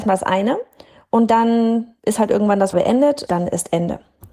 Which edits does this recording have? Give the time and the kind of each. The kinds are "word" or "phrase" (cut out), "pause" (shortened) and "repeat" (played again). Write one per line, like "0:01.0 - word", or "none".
0:02.0 - pause
0:02.7 - word
0:03.3 - word